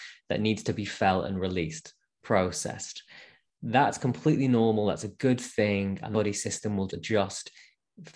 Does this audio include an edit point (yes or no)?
yes